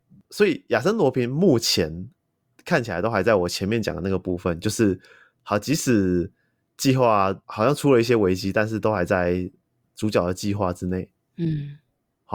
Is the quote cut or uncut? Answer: uncut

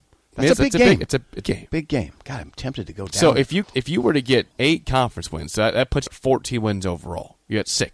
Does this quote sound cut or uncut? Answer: cut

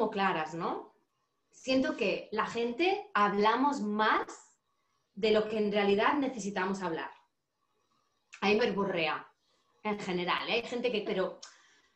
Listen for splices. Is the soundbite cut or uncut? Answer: cut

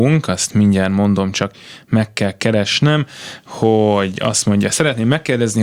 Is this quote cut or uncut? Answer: uncut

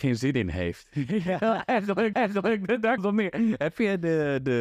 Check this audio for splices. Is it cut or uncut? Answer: cut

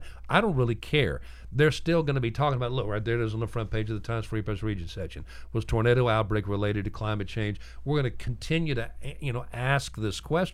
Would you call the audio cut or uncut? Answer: uncut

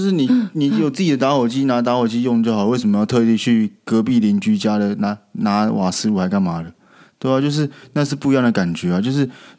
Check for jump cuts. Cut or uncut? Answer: uncut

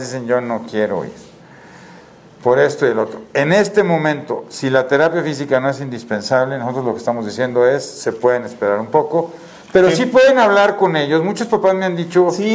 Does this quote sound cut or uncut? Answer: uncut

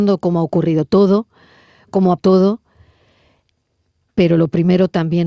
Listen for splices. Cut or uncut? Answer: cut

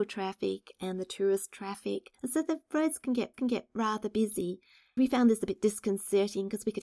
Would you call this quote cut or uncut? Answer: cut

